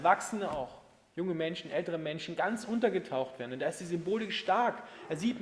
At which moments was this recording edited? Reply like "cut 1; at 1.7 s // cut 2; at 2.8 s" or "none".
none